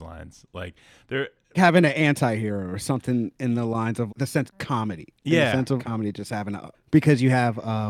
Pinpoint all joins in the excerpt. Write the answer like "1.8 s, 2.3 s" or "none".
1.5 s, 4.1 s, 4.5 s, 5.2 s, 5.8 s, 6.7 s